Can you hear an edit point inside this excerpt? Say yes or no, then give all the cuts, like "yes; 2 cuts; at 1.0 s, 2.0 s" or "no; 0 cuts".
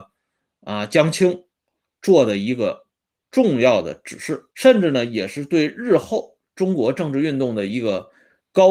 yes; 1 cut; at 4.5 s